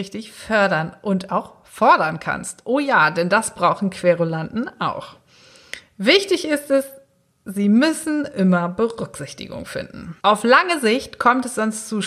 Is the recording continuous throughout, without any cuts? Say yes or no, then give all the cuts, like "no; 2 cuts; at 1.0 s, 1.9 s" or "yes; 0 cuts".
no; 1 cut; at 10.2 s